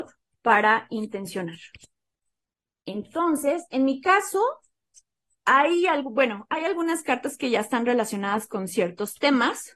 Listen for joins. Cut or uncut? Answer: uncut